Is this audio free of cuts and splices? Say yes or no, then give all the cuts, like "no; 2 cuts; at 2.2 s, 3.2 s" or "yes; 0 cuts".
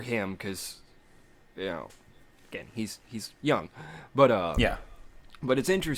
yes; 0 cuts